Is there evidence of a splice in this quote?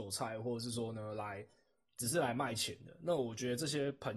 no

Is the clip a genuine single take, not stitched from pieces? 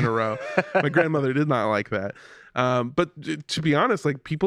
yes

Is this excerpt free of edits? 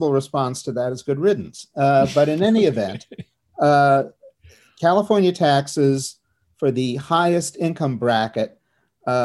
yes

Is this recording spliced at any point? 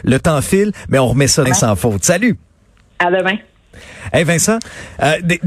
yes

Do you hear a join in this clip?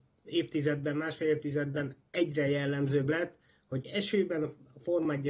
no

